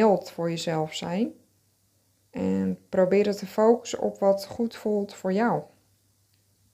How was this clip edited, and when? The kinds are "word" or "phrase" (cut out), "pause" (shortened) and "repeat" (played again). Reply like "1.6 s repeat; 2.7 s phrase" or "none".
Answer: none